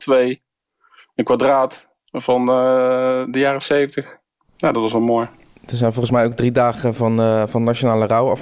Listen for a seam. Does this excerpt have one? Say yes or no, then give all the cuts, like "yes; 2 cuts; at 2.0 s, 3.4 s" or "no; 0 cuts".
no; 0 cuts